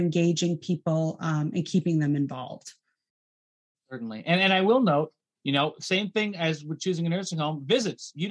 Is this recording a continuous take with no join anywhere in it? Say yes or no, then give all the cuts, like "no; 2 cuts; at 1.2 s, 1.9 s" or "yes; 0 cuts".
yes; 0 cuts